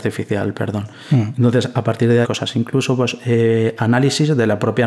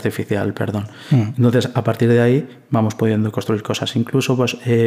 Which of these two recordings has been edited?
first; 1 cut; at 2.2 s

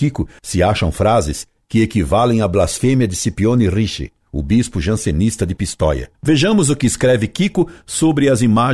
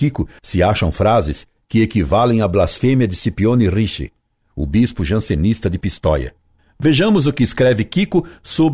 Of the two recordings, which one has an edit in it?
first; 2 cuts; at 4.2 s, 6.1 s

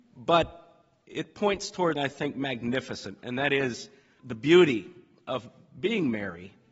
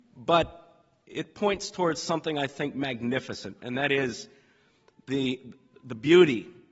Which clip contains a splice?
first; 2 cuts; at 2.0 s, 4.2 s

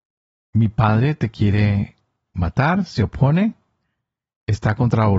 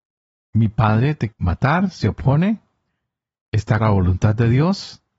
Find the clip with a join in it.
second; 2 cuts; at 1.3 s, 3.8 s

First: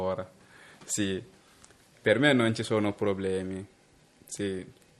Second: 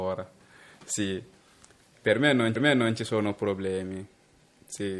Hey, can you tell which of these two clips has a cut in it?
second; 1 cut; at 2.6 s

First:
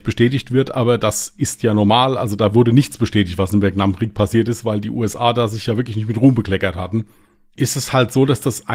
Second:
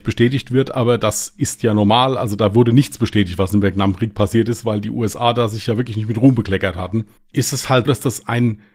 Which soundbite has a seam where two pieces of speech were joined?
second; 2 cuts; at 7.2 s, 7.9 s

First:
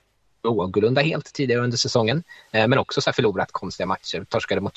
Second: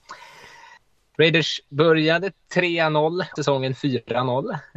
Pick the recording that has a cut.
second; 1 cut; at 3.4 s

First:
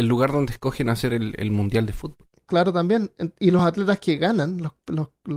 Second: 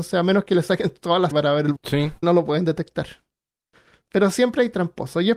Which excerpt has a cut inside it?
second; 3 cuts; at 1.3 s, 1.8 s, 2.2 s

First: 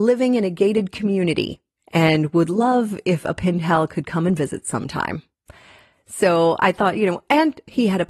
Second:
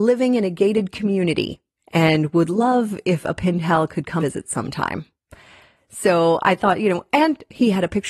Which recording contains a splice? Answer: second; 1 cut; at 4.2 s

